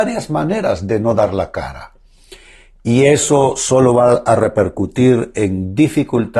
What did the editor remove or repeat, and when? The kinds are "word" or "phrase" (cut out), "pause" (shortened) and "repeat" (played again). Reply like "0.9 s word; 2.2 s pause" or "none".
none